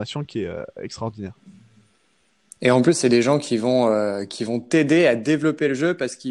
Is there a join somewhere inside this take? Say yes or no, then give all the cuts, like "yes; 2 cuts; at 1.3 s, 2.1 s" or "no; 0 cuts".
no; 0 cuts